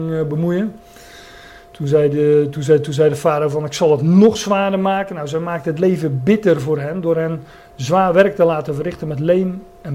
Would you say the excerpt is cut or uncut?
uncut